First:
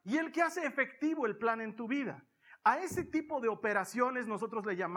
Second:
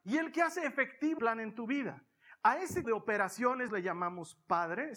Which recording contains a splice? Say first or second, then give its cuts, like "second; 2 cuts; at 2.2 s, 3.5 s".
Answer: second; 3 cuts; at 1.2 s, 2.8 s, 3.7 s